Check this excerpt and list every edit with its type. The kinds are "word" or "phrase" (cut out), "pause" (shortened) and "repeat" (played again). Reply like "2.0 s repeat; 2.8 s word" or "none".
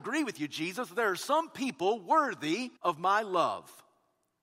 2.8 s pause

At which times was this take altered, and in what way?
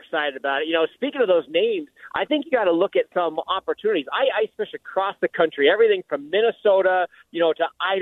none

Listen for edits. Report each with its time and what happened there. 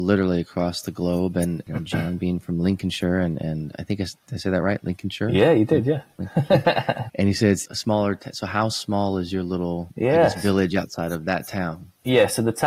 7.1 s word; 7.6 s word

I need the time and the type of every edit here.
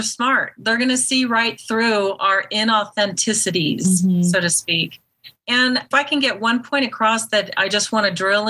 5.9 s word

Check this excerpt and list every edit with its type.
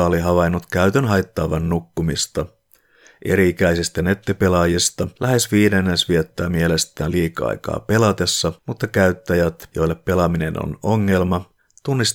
none

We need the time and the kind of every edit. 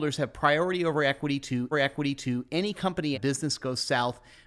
1.7 s repeat; 3.1 s phrase

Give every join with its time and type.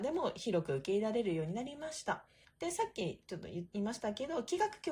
2.4 s pause

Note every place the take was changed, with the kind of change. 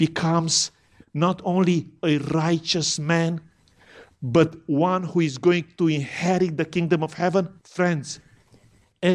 7.6 s pause

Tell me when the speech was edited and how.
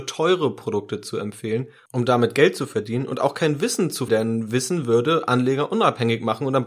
4.1 s word

